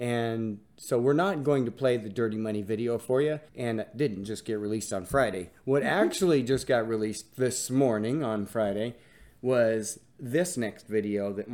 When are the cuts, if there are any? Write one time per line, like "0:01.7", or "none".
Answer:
0:03.5